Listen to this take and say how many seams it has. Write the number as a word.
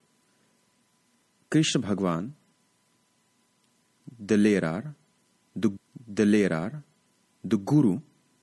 one